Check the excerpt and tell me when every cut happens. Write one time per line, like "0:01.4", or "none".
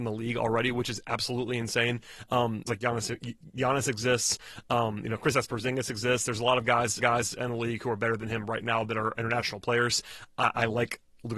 0:02.7
0:07.0